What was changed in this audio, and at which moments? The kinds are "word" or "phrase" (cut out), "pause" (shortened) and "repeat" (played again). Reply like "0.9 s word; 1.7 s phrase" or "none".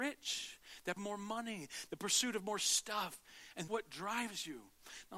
1.0 s word; 3.7 s word